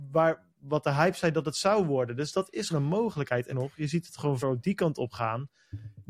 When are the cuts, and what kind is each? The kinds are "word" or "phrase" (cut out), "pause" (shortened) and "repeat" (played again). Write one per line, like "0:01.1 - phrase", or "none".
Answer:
0:02.7 - word
0:03.5 - word
0:04.4 - word